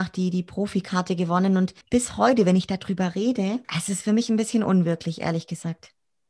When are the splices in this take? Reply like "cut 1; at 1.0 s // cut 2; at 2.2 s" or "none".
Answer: cut 1; at 1.8 s // cut 2; at 3.6 s